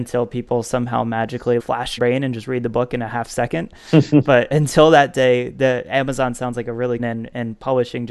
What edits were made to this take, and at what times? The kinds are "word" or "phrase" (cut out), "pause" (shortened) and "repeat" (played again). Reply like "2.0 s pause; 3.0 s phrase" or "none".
1.6 s phrase; 2.0 s phrase; 7.0 s phrase